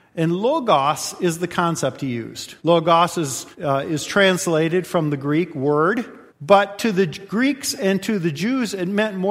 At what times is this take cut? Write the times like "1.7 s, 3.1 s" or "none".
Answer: 2.6 s, 3.5 s, 6.3 s